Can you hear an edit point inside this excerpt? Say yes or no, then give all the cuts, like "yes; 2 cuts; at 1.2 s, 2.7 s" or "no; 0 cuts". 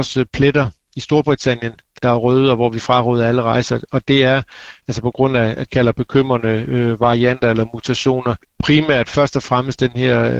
yes; 2 cuts; at 2.0 s, 5.7 s